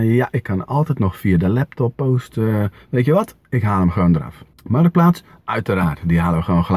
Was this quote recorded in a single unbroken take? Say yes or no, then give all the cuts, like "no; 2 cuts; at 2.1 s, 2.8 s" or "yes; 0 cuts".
no; 2 cuts; at 1.9 s, 4.5 s